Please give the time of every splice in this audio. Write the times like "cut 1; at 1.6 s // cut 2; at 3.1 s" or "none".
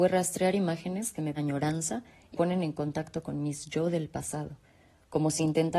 cut 1; at 1.4 s // cut 2; at 2.3 s